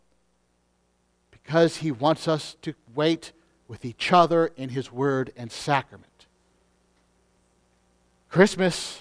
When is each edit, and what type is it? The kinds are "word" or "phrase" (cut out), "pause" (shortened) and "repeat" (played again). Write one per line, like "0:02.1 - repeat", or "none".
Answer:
none